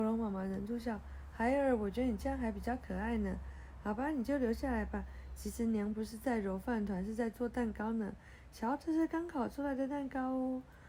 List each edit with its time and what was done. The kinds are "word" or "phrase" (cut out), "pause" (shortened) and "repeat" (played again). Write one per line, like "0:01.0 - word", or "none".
none